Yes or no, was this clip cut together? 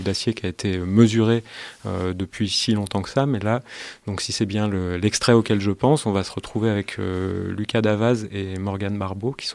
no